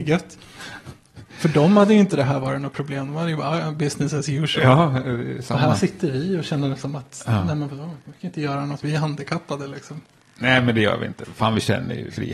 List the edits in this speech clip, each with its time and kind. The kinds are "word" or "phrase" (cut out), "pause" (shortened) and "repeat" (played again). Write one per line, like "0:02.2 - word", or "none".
none